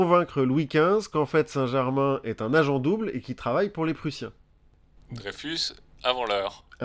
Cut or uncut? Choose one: uncut